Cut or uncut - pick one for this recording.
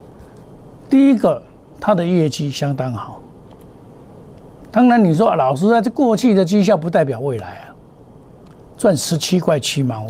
uncut